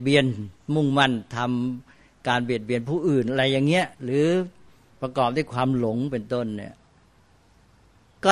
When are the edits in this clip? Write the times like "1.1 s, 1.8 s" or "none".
3.9 s